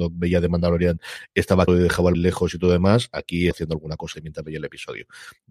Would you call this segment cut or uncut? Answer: cut